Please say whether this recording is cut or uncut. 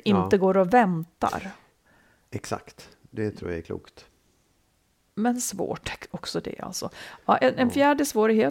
uncut